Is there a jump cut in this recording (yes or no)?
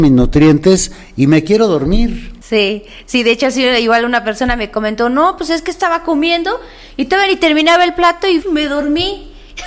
yes